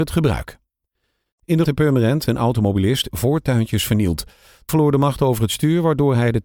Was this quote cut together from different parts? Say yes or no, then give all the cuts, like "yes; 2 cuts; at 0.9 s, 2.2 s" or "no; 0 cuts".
yes; 4 cuts; at 1.6 s, 2.2 s, 3.1 s, 4.7 s